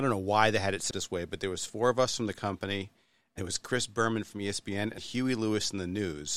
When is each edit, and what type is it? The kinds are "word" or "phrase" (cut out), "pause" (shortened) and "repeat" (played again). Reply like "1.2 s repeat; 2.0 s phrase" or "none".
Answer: 0.9 s word; 3.4 s word; 5.0 s word

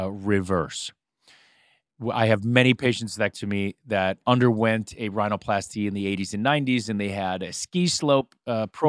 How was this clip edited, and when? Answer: 3.3 s word; 4.2 s word

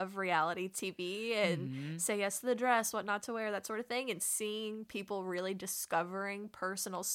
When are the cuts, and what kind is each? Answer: none

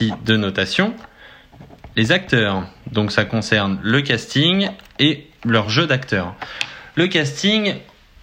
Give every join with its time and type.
none

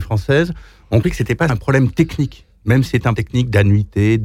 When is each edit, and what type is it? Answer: 1.0 s word; 1.5 s word; 2.9 s word; 3.2 s word

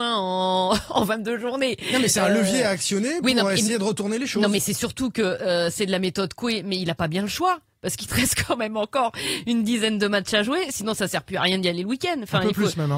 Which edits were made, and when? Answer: none

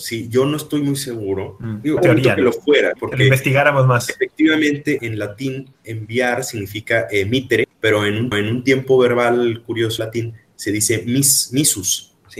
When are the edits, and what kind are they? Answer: 2.0 s phrase; 3.0 s word; 5.0 s word; 7.6 s word; 8.3 s repeat; 10.0 s word

